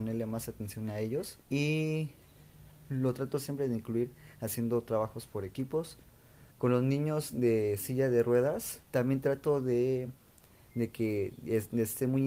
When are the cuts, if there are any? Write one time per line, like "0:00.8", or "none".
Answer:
0:01.4
0:06.5
0:08.9

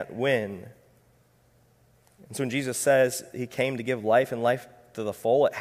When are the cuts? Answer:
none

